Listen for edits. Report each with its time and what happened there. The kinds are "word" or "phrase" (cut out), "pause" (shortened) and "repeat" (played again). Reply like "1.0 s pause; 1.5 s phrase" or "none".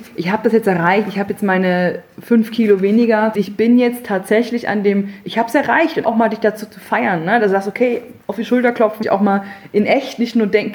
3.3 s phrase; 6.0 s word; 8.2 s pause; 9.0 s word